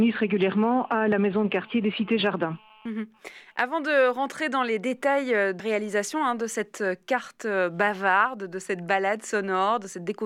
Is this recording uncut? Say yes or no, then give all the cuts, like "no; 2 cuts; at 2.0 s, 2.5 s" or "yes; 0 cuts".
no; 1 cut; at 5.6 s